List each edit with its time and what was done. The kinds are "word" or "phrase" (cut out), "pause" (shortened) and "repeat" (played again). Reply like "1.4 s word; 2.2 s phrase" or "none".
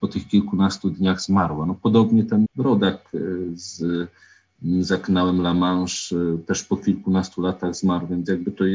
2.5 s word

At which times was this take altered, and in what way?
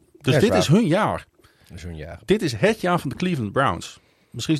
none

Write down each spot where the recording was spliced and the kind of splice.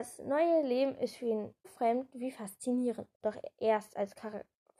1.6 s word; 3.1 s pause

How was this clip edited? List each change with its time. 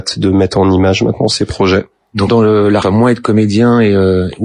2.3 s word; 2.8 s phrase

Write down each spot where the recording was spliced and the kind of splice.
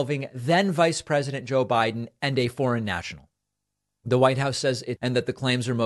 5.0 s word

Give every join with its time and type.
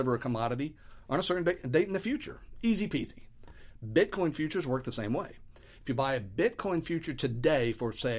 none

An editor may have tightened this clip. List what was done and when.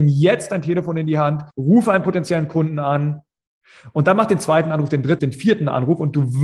1.5 s pause; 5.2 s word

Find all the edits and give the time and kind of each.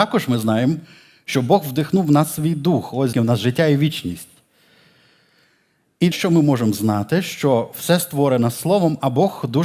3.1 s word; 6.1 s word

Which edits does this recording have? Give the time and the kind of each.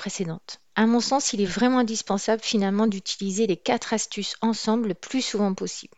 none

